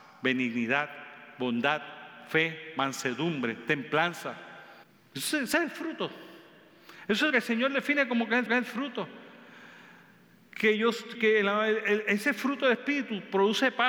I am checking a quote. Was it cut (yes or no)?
yes